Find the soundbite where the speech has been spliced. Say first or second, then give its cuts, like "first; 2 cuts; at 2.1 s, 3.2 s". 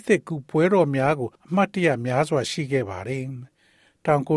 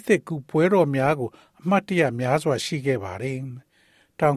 first; 1 cut; at 1.3 s